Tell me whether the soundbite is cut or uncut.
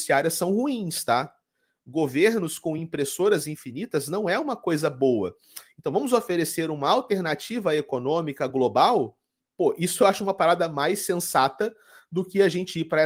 uncut